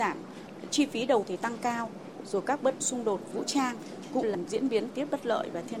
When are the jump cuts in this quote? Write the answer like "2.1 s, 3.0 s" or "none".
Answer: 1.2 s, 2.8 s, 3.3 s, 4.2 s, 4.9 s